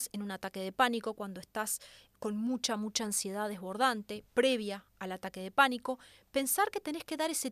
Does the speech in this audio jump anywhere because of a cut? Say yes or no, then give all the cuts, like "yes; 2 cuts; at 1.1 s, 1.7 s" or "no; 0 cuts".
no; 0 cuts